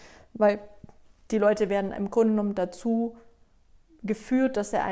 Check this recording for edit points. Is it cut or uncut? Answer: uncut